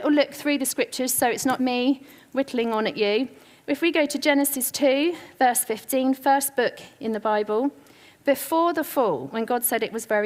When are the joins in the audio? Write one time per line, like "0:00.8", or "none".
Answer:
0:01.6